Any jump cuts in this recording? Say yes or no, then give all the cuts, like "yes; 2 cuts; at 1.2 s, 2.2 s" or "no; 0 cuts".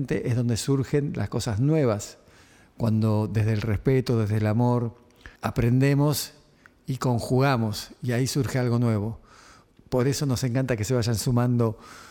yes; 1 cut; at 5.4 s